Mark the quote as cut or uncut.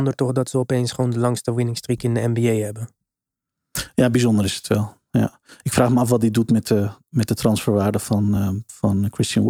uncut